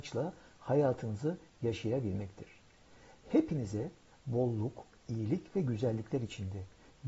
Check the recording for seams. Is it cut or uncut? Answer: uncut